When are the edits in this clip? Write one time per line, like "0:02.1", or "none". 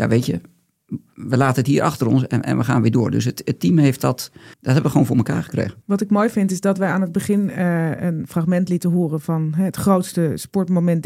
0:04.5
0:05.8

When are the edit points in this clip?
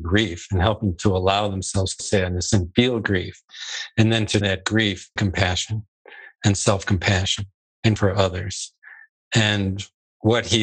0:00.9
0:02.0
0:04.4
0:05.2
0:08.0

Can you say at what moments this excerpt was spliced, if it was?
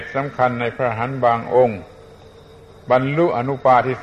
none

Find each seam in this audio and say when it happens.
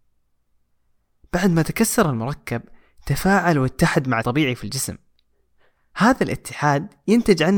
0:04.2

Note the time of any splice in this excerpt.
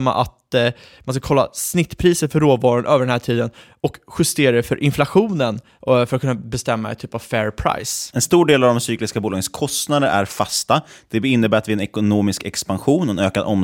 none

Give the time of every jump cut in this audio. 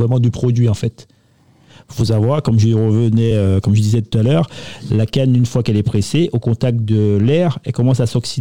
none

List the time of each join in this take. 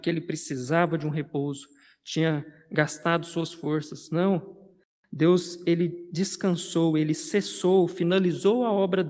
none

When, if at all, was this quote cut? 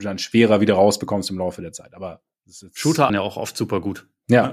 0:03.1

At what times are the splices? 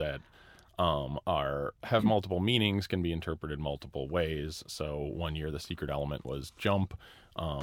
none

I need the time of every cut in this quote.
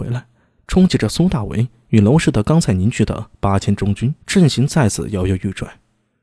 0:04.2

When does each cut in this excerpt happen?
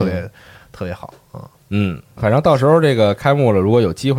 0:02.2

